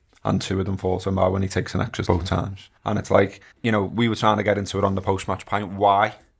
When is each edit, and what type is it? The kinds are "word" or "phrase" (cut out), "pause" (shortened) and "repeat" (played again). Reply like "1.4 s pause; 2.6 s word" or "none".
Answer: 2.0 s word; 2.8 s pause; 3.5 s pause